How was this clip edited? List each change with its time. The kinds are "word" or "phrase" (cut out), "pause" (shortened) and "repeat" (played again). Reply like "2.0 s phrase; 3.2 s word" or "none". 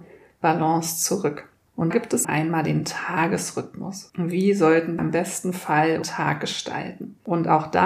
1.9 s word; 2.2 s word; 5.0 s word; 6.0 s word